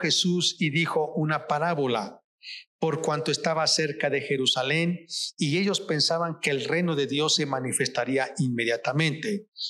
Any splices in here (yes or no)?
no